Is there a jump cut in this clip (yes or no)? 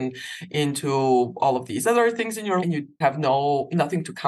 yes